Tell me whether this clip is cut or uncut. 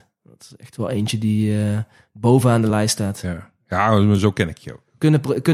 uncut